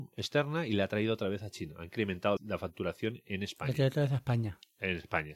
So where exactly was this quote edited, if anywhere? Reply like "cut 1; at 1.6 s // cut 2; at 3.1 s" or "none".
cut 1; at 2.4 s